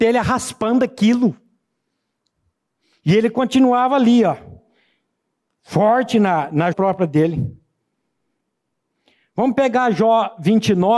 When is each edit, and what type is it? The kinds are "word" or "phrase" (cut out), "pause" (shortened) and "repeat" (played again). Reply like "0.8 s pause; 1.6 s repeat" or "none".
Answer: 6.7 s word